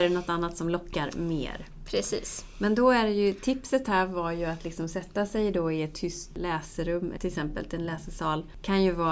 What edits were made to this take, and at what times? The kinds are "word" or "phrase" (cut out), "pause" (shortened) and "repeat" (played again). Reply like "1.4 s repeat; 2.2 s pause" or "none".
none